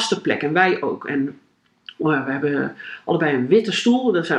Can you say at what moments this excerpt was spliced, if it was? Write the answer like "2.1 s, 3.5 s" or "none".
none